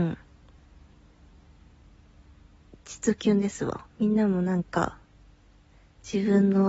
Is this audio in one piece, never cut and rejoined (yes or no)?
no